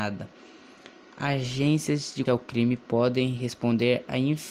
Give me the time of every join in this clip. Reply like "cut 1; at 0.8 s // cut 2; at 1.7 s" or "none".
cut 1; at 2.3 s